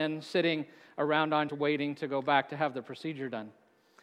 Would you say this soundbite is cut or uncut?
cut